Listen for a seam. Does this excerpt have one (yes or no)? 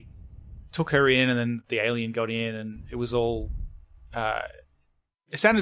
no